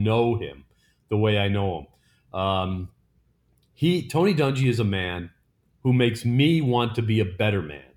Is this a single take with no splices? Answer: yes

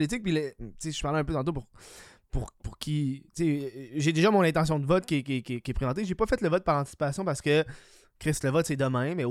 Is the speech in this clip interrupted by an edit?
no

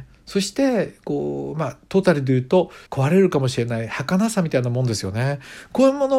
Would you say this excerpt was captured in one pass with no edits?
no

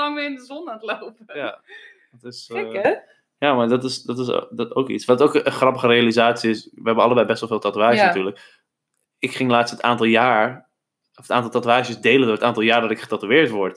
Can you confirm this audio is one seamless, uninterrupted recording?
yes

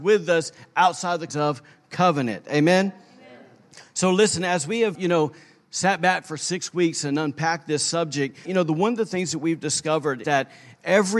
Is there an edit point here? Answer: yes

